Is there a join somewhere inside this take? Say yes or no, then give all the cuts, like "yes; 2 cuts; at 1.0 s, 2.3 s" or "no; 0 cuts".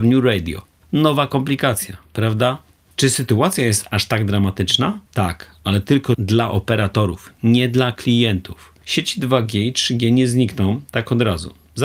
yes; 1 cut; at 5.1 s